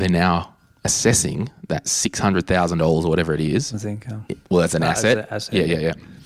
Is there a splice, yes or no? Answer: yes